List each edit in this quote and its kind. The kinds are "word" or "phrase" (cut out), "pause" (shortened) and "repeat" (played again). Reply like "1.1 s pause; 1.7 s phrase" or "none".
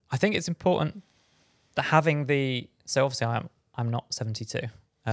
2.8 s pause

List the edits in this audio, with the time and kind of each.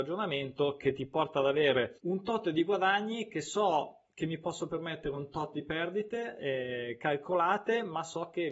2.0 s pause

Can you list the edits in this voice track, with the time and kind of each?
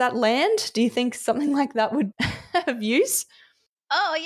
2.1 s word

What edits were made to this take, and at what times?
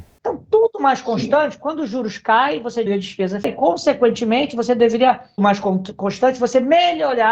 2.9 s word; 3.4 s word; 5.4 s word

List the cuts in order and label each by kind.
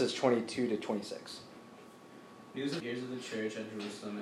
2.8 s phrase

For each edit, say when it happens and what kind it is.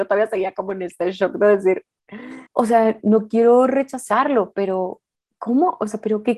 2.5 s pause

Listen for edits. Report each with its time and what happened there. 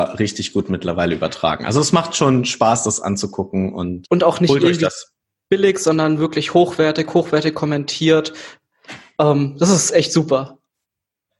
4.0 s word

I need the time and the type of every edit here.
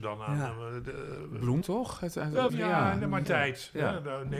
1.6 s word; 2.5 s word; 3.2 s word

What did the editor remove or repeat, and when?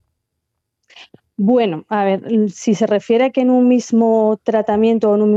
none

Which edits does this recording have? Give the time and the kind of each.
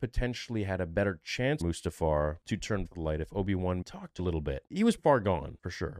1.6 s word; 2.8 s word; 3.8 s word; 4.2 s word; 5.0 s word

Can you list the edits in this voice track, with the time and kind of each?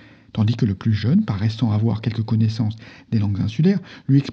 none

